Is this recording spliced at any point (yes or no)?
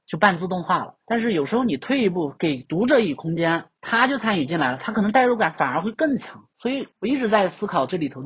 yes